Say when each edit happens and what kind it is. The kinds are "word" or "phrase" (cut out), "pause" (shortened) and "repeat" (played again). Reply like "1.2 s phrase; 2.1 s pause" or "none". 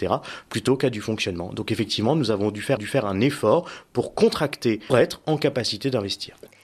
2.8 s repeat; 4.9 s phrase